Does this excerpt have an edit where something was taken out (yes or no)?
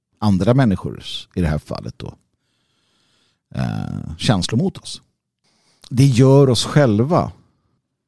no